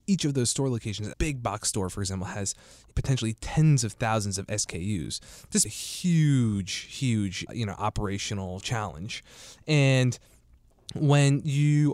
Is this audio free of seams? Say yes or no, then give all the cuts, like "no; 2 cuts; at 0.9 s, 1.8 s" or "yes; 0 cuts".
no; 4 cuts; at 1.1 s, 2.9 s, 5.6 s, 7.5 s